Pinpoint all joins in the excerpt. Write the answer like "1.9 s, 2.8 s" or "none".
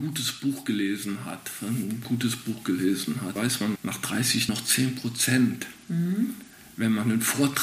2.0 s, 3.4 s, 3.8 s, 4.5 s